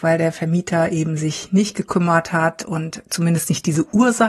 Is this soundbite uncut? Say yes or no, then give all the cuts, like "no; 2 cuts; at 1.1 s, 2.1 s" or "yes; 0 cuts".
yes; 0 cuts